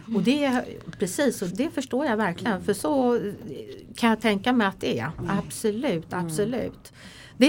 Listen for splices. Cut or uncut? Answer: cut